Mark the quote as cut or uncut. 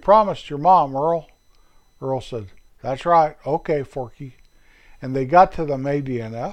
uncut